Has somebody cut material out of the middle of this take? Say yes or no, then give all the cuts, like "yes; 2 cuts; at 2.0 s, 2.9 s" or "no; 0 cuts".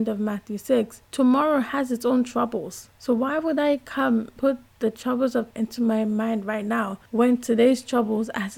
yes; 3 cuts; at 4.4 s, 5.5 s, 7.1 s